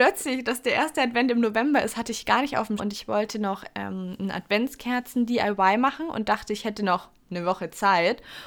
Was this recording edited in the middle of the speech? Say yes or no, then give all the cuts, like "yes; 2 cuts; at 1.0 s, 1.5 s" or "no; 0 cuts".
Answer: yes; 1 cut; at 2.8 s